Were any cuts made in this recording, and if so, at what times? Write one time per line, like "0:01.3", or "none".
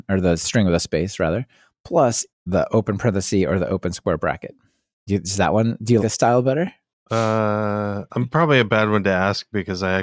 0:02.3
0:06.0
0:08.1